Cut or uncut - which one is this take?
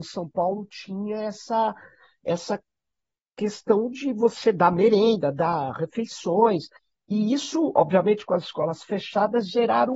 cut